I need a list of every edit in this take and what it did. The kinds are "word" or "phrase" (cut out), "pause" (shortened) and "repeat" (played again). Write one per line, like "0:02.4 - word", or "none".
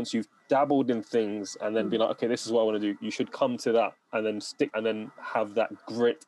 0:04.7 - phrase